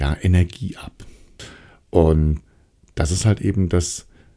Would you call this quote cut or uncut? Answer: uncut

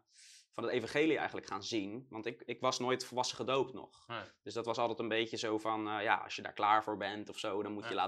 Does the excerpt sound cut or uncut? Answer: uncut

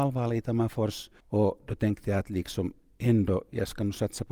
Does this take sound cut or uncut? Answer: cut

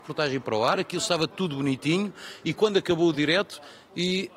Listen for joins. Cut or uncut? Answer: uncut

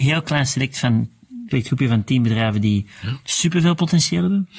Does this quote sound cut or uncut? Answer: cut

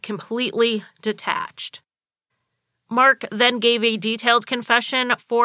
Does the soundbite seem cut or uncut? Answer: uncut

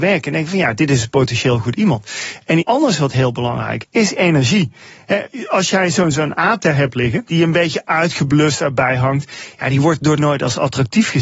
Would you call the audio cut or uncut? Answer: cut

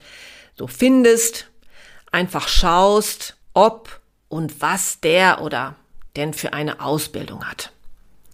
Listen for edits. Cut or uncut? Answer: cut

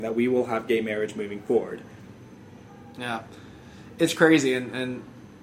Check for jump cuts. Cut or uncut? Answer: uncut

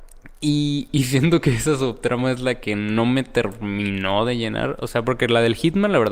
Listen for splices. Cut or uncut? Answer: uncut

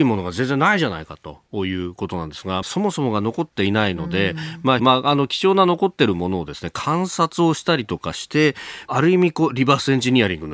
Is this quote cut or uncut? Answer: cut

